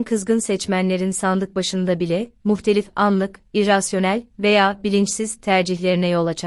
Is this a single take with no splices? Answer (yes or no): yes